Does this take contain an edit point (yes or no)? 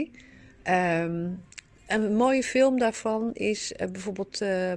no